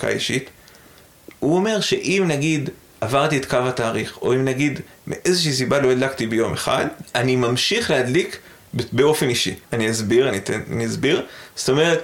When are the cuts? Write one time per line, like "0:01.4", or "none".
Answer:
0:09.6